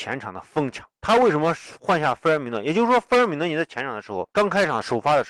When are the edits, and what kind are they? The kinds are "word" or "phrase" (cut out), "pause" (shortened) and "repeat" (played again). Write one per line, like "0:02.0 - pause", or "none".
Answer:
0:01.0 - pause
0:04.3 - pause